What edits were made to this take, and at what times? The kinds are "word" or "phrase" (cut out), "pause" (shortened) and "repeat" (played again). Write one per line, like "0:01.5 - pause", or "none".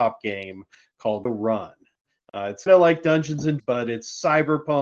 0:01.2 - word
0:02.7 - word
0:03.6 - word